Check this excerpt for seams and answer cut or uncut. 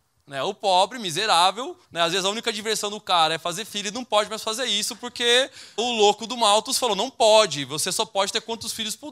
cut